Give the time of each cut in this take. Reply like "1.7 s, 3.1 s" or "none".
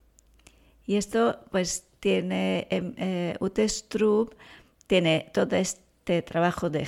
none